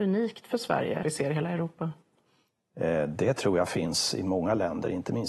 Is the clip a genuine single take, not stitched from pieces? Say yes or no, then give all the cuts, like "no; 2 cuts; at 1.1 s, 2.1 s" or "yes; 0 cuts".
no; 1 cut; at 1.0 s